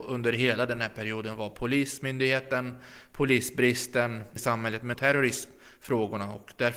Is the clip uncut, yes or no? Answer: no